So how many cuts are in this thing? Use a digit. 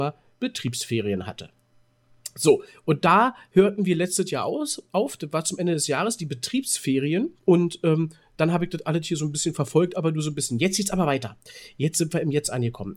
1